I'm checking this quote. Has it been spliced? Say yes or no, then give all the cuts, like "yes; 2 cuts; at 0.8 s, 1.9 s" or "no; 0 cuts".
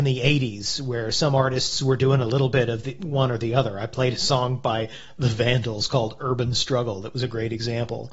no; 0 cuts